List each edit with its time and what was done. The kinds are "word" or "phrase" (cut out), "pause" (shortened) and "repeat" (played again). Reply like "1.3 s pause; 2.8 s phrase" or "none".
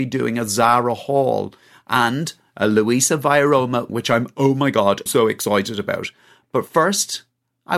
3.9 s word; 5.1 s word